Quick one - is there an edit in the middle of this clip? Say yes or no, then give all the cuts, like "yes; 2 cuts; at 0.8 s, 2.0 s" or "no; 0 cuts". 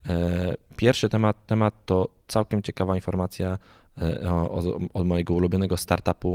yes; 1 cut; at 1.5 s